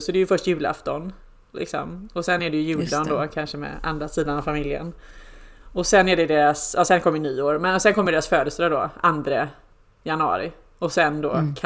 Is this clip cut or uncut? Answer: uncut